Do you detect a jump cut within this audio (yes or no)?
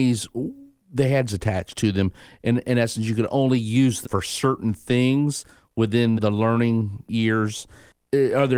yes